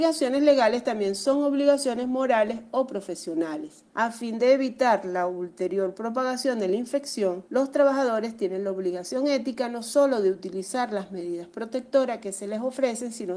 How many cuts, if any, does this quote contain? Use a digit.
2